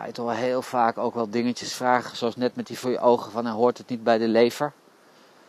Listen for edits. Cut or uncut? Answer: cut